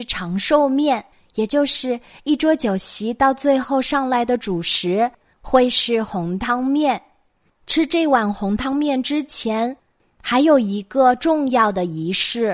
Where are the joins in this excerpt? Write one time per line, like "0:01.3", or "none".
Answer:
0:01.1